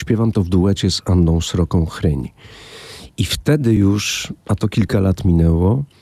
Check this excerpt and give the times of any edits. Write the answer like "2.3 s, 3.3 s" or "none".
none

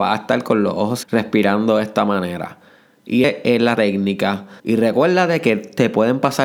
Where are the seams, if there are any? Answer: 1.0 s, 3.2 s, 3.7 s, 4.6 s

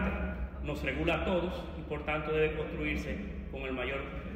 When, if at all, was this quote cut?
none

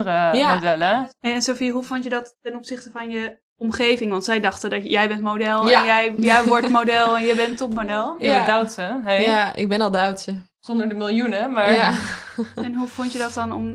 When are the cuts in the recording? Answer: 3.5 s

